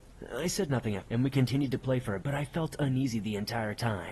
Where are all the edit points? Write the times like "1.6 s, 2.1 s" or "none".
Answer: 1.1 s, 2.2 s